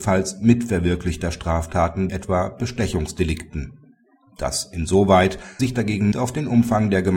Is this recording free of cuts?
no; 3 cuts; at 2.1 s, 5.6 s, 6.1 s

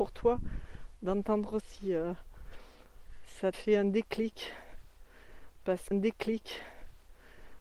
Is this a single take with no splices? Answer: no; 3 cuts; at 1.6 s, 3.5 s, 5.9 s

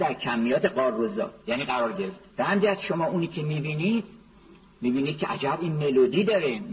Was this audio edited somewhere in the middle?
yes; 2 cuts; at 1.4 s, 2.3 s

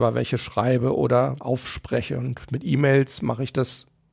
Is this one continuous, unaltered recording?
no; 1 cut; at 1.4 s

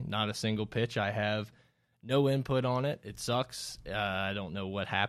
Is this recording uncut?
yes; 0 cuts

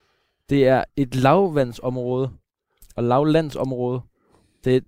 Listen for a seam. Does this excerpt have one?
no; 0 cuts

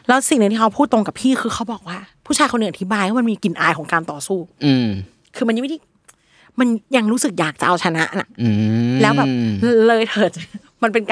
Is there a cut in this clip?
no; 0 cuts

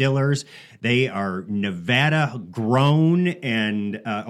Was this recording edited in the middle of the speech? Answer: no; 0 cuts

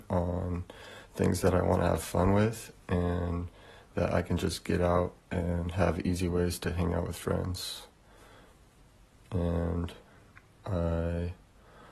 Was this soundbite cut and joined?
no; 0 cuts

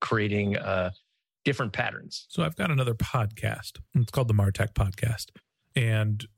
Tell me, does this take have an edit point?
yes; 1 cut; at 3.9 s

